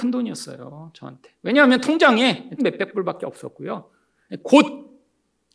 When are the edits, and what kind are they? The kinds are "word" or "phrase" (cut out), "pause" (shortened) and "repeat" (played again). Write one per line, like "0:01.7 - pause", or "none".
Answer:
0:02.6 - word